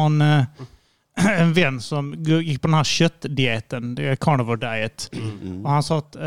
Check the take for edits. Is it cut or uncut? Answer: uncut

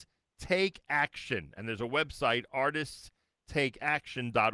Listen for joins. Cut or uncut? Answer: uncut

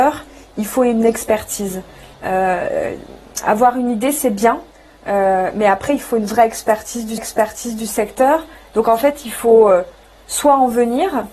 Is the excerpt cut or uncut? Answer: cut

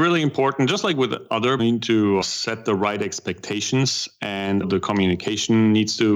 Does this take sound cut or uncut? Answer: cut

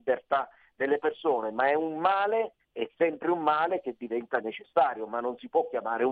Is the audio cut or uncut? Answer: cut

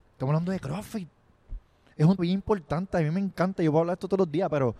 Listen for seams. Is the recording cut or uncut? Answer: cut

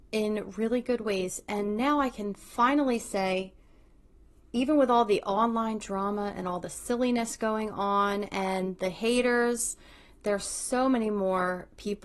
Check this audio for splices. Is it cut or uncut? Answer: uncut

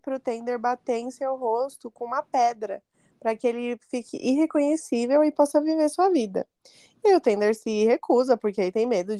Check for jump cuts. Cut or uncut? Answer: uncut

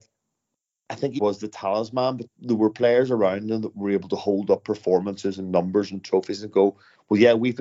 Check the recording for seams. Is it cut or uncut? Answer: cut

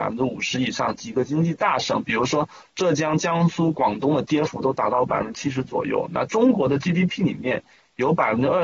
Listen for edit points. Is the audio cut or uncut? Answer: uncut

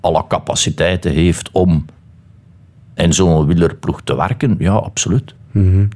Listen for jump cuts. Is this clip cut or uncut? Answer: uncut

